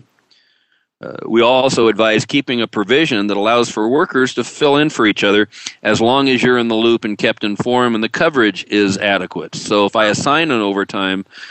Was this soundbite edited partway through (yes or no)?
no